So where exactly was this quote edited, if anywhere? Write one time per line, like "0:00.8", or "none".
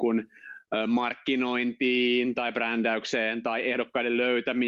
none